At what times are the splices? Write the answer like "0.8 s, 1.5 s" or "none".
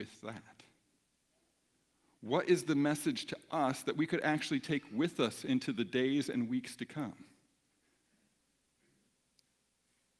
none